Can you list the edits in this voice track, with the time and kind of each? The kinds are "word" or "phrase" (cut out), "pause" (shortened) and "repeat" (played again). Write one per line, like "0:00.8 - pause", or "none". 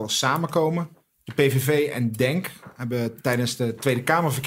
none